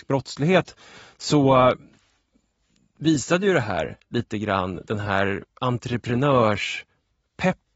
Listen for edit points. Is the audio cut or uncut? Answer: uncut